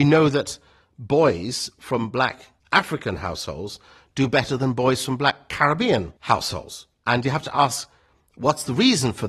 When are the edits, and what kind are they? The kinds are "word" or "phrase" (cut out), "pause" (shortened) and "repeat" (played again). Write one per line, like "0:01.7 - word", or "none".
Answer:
0:02.6 - pause
0:06.2 - pause